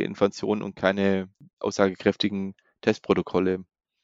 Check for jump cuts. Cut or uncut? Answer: uncut